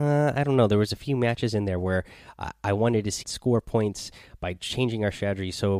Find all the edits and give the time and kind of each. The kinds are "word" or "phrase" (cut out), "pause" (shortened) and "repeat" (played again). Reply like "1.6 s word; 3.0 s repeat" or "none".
3.2 s phrase